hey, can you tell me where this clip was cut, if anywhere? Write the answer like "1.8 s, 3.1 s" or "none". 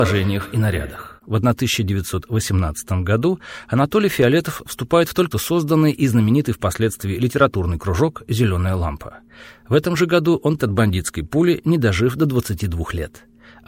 1.2 s, 5.3 s, 10.6 s

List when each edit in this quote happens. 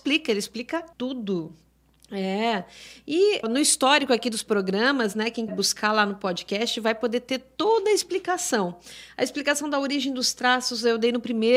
0.9 s, 3.4 s, 5.5 s

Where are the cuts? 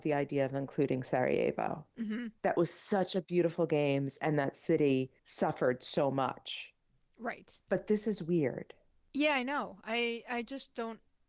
2.4 s, 5.2 s, 7.6 s

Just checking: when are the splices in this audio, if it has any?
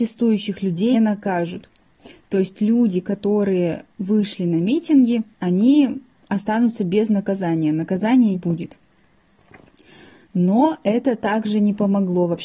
0.9 s, 3.9 s, 5.3 s, 8.3 s

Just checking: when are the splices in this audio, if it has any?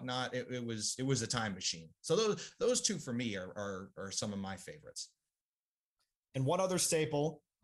none

